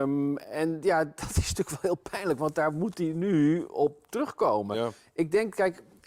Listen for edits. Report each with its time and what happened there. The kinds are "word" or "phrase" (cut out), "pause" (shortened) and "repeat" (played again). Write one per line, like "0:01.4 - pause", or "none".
none